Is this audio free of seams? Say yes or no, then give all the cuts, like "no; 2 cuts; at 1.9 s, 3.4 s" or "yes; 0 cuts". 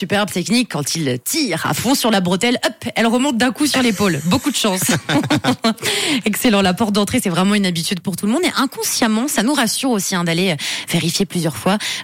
yes; 0 cuts